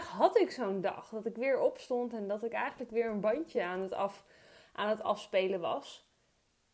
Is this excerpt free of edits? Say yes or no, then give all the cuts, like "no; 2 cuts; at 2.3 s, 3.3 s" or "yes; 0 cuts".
yes; 0 cuts